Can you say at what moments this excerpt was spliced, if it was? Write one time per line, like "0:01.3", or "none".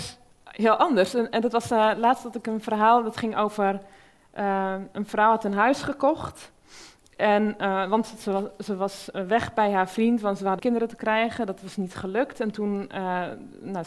0:10.6